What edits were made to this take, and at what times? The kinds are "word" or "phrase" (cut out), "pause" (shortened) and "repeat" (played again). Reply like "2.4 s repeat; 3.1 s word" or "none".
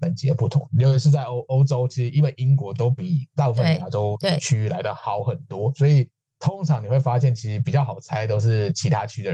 none